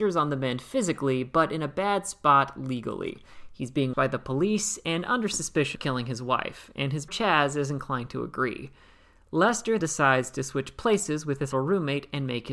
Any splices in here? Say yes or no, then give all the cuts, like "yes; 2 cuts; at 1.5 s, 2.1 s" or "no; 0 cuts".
yes; 5 cuts; at 3.9 s, 5.8 s, 7.1 s, 9.8 s, 11.5 s